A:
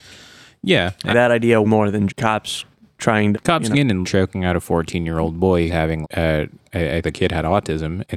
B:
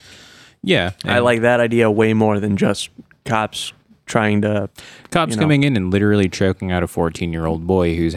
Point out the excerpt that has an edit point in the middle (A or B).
A